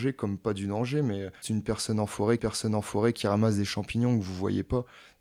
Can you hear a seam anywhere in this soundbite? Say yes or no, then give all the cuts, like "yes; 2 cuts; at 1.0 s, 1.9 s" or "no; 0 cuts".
yes; 2 cuts; at 1.4 s, 2.4 s